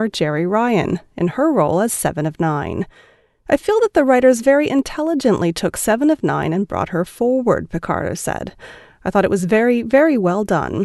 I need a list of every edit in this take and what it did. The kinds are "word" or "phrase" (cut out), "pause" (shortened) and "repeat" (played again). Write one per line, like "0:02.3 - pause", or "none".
none